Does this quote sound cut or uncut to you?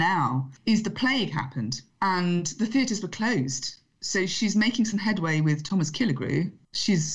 uncut